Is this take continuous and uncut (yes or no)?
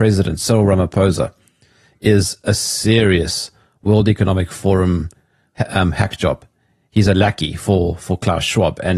yes